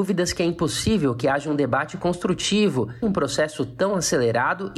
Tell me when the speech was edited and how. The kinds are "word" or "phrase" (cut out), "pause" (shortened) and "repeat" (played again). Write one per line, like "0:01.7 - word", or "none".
0:03.0 - word